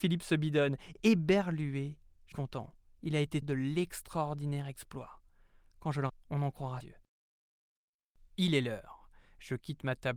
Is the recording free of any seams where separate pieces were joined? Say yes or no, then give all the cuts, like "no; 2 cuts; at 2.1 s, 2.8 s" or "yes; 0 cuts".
no; 4 cuts; at 2.3 s, 3.4 s, 6.1 s, 6.8 s